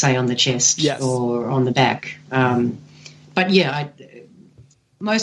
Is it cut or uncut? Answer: uncut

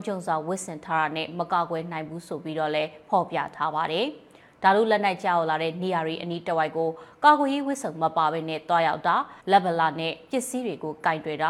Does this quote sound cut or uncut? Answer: cut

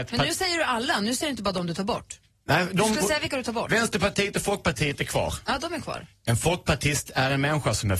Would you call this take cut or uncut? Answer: uncut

